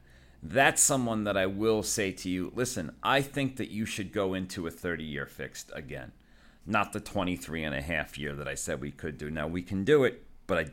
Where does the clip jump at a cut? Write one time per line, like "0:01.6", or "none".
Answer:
none